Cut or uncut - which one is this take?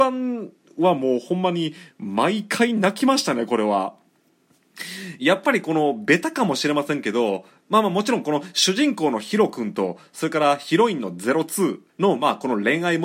cut